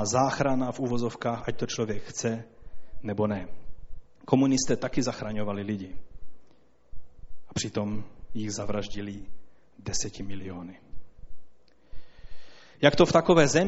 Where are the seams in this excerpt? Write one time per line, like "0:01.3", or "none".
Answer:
none